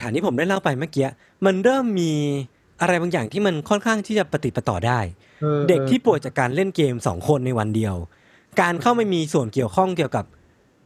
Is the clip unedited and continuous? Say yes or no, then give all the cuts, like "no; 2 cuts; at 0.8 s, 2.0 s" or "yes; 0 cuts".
yes; 0 cuts